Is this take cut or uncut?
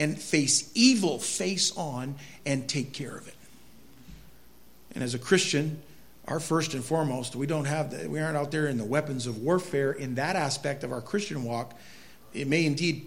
uncut